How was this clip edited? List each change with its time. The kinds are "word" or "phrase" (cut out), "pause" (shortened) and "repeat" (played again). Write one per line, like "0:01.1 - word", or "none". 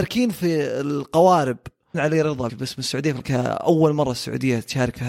0:01.9 - word
0:02.5 - word
0:03.2 - word